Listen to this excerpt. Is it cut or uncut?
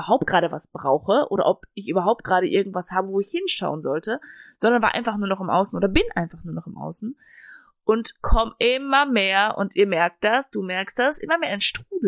uncut